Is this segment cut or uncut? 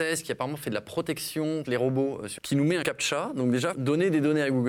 cut